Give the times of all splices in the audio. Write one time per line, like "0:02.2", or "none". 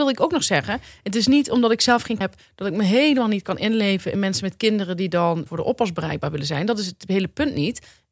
0:02.2
0:05.5